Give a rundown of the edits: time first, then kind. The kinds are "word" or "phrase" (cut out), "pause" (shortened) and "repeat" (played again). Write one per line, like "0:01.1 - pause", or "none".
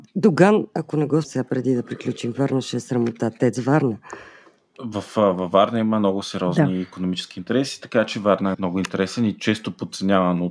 0:01.2 - word
0:08.5 - word